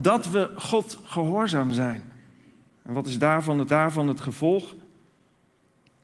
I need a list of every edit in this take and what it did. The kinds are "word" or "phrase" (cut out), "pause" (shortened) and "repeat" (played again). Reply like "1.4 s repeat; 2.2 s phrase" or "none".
3.7 s repeat